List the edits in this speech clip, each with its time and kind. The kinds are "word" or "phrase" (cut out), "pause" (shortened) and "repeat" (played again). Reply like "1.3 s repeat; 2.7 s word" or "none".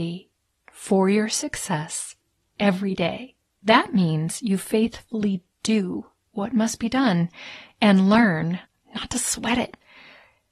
3.4 s pause